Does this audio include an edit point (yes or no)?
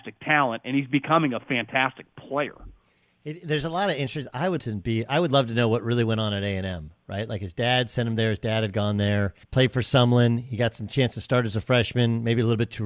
yes